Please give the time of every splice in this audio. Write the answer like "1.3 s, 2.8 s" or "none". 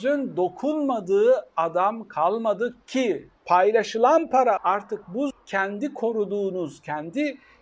3.4 s, 4.6 s, 5.3 s